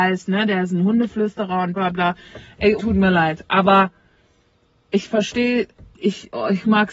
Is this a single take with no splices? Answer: no; 3 cuts; at 1.8 s, 2.8 s, 5.9 s

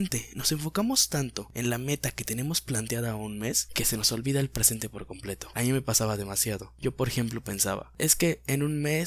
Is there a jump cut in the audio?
no; 0 cuts

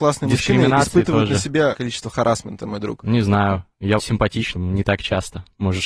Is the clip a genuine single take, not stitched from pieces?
no; 3 cuts; at 1.7 s, 4.0 s, 4.6 s

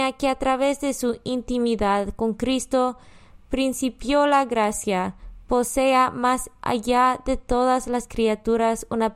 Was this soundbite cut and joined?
no; 0 cuts

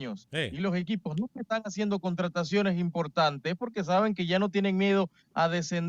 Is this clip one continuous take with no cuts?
yes; 0 cuts

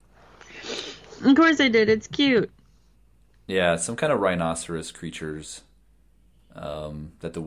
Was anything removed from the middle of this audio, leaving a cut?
no; 0 cuts

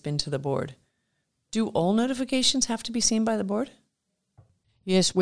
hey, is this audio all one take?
yes; 0 cuts

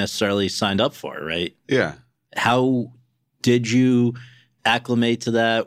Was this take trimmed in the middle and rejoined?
no; 0 cuts

